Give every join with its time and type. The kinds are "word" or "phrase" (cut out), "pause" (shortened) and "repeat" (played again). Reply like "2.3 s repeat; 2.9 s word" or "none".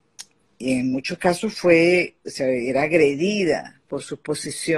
none